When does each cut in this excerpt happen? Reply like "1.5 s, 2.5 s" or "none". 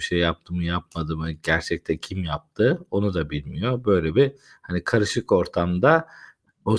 none